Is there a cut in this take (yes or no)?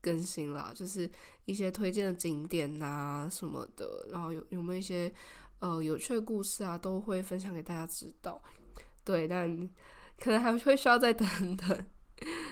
no